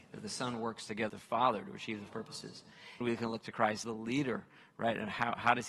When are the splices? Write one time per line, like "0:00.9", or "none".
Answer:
0:01.1
0:02.1
0:03.0
0:03.8